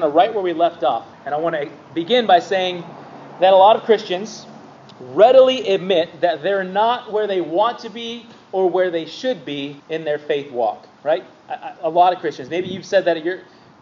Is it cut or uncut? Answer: cut